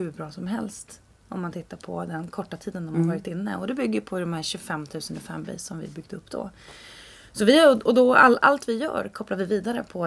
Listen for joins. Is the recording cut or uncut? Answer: uncut